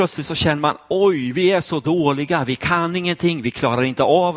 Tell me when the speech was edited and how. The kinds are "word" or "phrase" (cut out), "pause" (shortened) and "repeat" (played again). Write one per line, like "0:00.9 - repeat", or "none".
none